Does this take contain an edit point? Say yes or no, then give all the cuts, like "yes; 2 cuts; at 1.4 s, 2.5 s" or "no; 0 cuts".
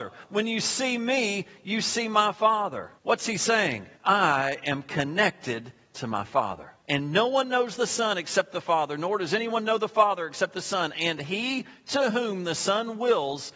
yes; 3 cuts; at 3.0 s, 3.9 s, 6.8 s